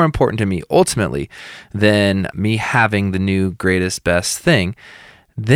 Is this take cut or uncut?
cut